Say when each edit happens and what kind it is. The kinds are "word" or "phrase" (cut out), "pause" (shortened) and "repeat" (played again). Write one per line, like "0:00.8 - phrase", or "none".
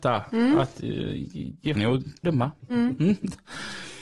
0:01.8 - word
0:02.2 - phrase